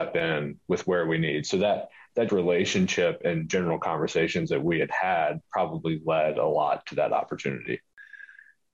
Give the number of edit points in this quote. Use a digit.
1